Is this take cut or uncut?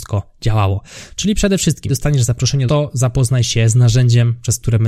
cut